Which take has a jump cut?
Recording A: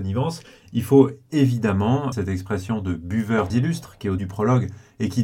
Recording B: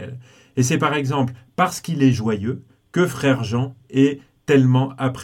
A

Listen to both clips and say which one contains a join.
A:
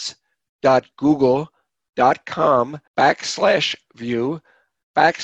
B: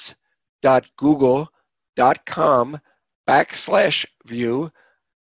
A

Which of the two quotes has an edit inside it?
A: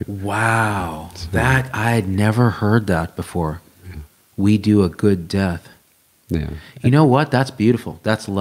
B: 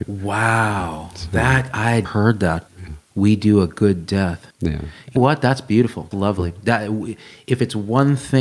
B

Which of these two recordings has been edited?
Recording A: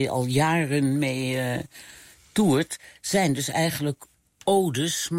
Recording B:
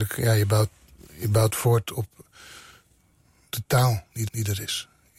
B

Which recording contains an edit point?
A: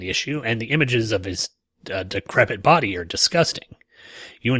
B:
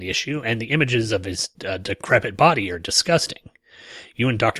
B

